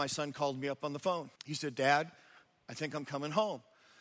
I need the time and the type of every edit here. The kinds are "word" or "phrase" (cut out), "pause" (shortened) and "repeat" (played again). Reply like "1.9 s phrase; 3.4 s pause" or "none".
1.4 s pause